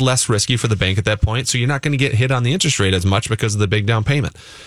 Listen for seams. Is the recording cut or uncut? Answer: uncut